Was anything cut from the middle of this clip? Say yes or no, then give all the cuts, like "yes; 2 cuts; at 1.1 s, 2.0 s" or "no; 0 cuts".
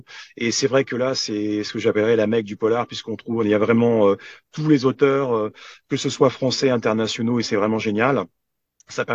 no; 0 cuts